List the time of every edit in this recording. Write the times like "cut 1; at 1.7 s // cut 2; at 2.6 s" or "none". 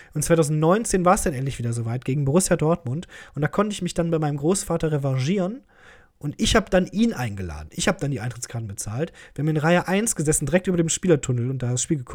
none